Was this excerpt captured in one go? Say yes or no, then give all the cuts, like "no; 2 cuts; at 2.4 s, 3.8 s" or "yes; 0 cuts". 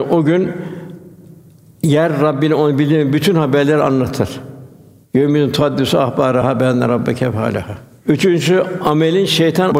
yes; 0 cuts